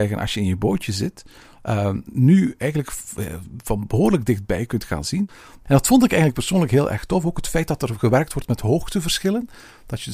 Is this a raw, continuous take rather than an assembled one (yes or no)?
yes